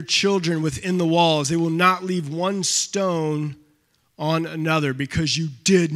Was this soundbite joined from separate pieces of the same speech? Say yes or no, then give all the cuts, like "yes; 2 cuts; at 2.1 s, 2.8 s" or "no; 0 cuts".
no; 0 cuts